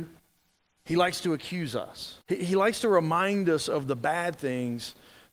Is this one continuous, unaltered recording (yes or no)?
no